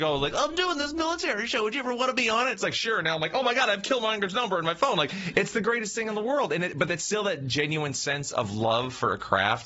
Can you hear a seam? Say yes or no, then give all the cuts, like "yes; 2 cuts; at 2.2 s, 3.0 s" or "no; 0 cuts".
no; 0 cuts